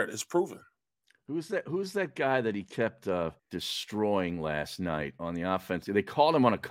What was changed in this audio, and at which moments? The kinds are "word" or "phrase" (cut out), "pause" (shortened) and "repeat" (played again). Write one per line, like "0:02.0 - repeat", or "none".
0:03.4 - pause

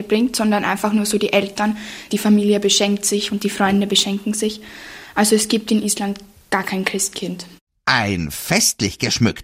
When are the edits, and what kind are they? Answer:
none

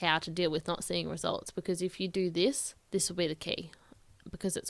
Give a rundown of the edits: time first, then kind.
0:02.8 - pause

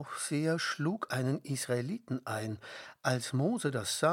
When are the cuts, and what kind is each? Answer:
0:01.1 - word

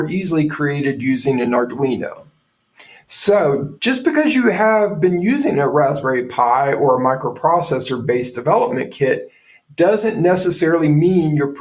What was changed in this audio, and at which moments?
none

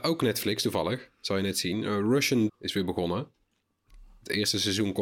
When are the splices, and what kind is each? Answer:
0:02.5 - word

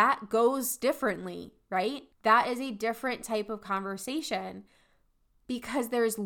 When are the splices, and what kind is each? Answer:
0:02.1 - pause

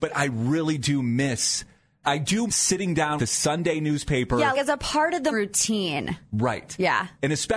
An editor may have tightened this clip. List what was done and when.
0:02.0 - word
0:02.5 - word
0:03.2 - word
0:04.5 - word
0:05.3 - word

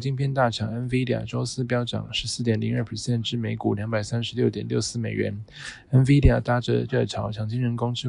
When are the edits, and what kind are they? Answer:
0:06.9 - word

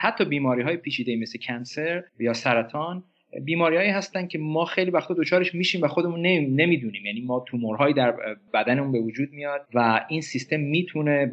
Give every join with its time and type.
0:02.1 - pause
0:09.7 - pause

